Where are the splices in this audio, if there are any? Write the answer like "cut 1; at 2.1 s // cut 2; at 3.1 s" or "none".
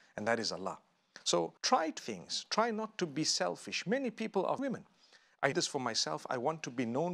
cut 1; at 1.6 s // cut 2; at 2.0 s // cut 3; at 4.6 s // cut 4; at 5.5 s